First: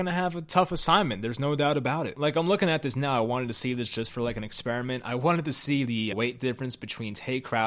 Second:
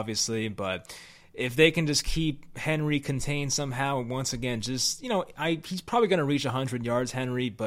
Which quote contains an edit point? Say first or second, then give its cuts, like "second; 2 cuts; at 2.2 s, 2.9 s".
first; 1 cut; at 6.1 s